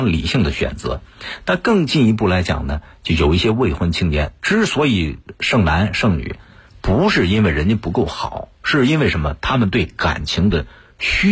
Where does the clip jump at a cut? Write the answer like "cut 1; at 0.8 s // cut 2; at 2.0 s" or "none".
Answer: none

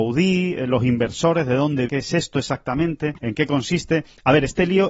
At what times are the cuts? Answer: cut 1; at 1.9 s // cut 2; at 3.2 s

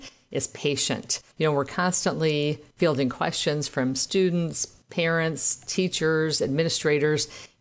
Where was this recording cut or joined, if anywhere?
cut 1; at 1.3 s

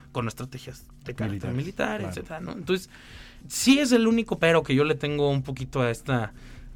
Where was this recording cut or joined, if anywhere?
cut 1; at 3.4 s

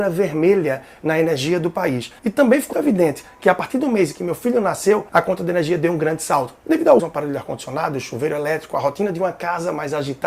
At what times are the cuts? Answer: cut 1; at 2.2 s // cut 2; at 2.7 s // cut 3; at 5.1 s // cut 4; at 7.0 s

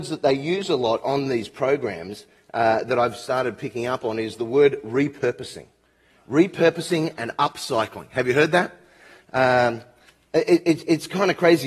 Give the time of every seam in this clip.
none

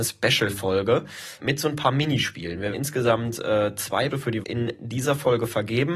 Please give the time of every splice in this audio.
cut 1; at 1.4 s // cut 2; at 2.7 s // cut 3; at 4.1 s // cut 4; at 4.4 s

